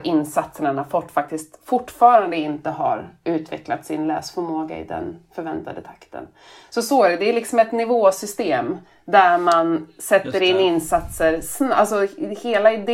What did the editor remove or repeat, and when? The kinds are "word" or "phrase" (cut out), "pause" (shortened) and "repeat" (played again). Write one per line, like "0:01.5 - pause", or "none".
none